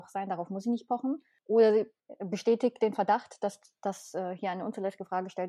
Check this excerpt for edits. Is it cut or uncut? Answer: uncut